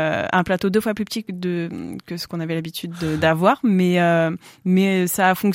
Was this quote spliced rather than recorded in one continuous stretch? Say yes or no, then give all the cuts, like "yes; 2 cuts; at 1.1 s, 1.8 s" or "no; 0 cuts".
no; 0 cuts